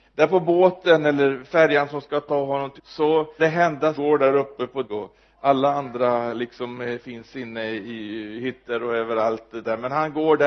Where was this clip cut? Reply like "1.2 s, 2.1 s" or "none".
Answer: 2.8 s, 3.4 s, 3.9 s, 4.8 s